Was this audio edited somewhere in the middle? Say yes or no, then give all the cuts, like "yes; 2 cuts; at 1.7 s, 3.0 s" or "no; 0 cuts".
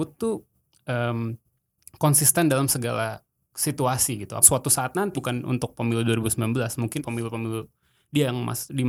yes; 4 cuts; at 3.3 s, 4.4 s, 5.1 s, 7.0 s